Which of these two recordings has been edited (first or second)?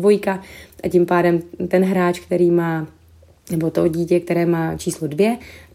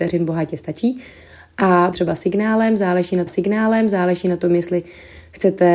second